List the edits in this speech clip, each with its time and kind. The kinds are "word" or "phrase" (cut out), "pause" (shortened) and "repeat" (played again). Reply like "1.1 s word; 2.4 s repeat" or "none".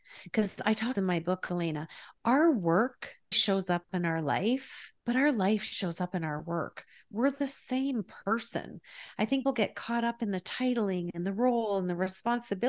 0.9 s phrase; 3.3 s word; 5.0 s pause; 9.4 s word